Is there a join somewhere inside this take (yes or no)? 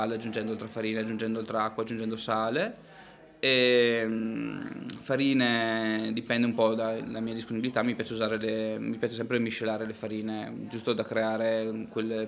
no